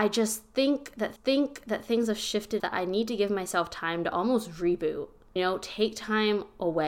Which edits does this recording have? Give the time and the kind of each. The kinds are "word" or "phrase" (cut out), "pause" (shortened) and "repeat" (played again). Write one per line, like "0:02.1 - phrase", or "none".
0:01.2 - repeat
0:02.6 - word
0:05.4 - word